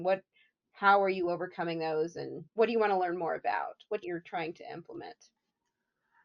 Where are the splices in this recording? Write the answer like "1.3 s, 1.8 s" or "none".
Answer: 2.5 s, 4.0 s